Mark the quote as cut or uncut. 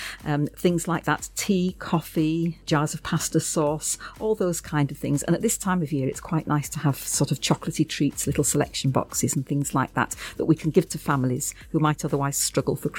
uncut